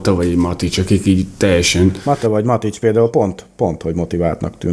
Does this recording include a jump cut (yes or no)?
no